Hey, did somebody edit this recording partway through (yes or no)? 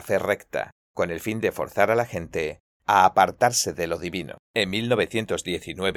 yes